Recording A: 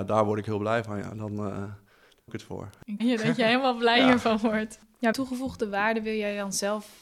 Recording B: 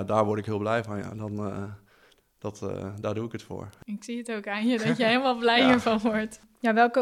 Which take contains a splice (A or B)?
A